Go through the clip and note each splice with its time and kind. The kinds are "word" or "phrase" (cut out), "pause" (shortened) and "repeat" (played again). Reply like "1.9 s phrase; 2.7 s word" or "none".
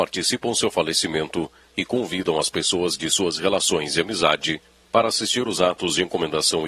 none